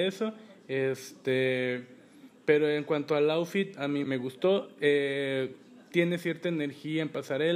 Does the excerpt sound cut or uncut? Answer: cut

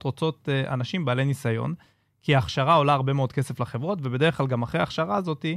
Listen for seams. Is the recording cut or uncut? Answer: uncut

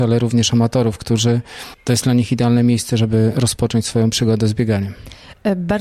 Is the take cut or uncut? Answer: uncut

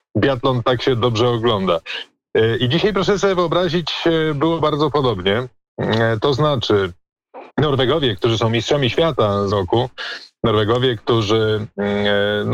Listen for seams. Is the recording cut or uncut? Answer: cut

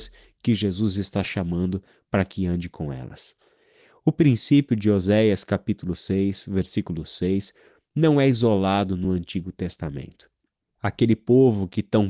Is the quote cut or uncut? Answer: uncut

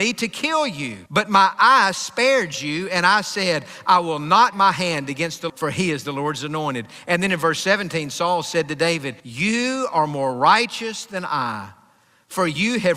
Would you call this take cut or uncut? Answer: cut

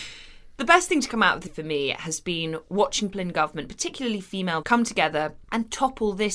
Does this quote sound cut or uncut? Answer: cut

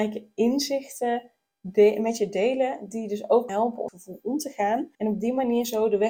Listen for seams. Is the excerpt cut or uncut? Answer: cut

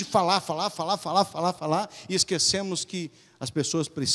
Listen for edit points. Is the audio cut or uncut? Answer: uncut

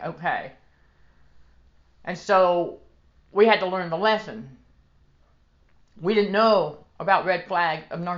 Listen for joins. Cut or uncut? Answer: uncut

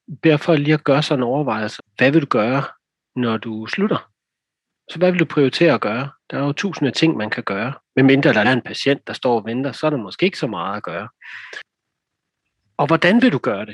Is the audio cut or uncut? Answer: cut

